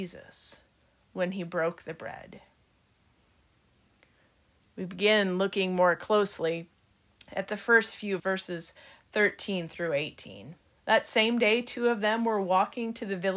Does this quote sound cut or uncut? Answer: cut